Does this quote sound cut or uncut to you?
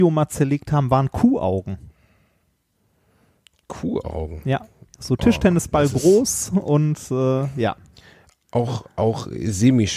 uncut